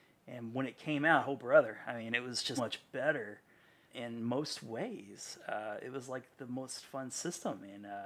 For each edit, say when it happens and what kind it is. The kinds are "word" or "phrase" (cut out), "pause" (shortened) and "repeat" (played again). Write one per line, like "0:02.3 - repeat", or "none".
0:02.6 - word
0:03.9 - word